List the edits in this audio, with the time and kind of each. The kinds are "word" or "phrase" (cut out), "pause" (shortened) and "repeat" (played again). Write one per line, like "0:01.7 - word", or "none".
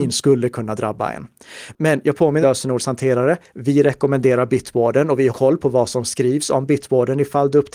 0:02.4 - phrase
0:05.3 - word

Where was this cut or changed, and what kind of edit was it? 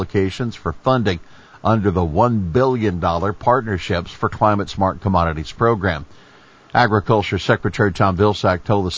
none

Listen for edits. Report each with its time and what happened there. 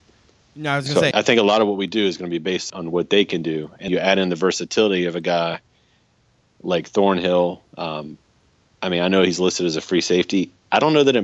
0:01.1 - word
0:02.7 - word
0:03.9 - word

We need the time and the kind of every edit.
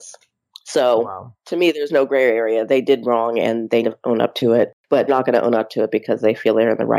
0:03.8 - word
0:05.1 - word

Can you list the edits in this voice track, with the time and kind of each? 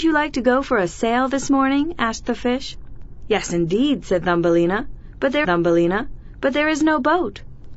0:05.4 - repeat

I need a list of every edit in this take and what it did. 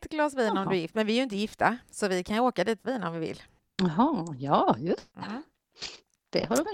0:01.8 - pause
0:02.8 - phrase
0:03.6 - pause
0:05.1 - pause

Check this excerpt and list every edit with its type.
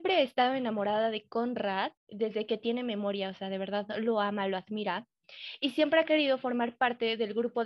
0:02.0 - pause

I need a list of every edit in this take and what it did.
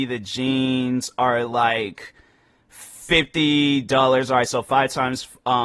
none

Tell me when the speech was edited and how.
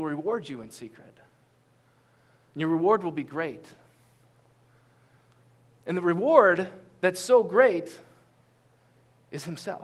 none

